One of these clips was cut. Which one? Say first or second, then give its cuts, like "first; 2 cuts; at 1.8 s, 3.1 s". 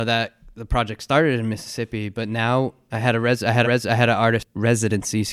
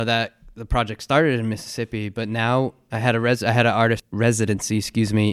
first; 1 cut; at 3.6 s